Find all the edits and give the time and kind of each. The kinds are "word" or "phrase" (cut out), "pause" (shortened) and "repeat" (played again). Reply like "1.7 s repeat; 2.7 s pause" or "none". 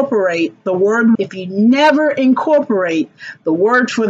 1.1 s word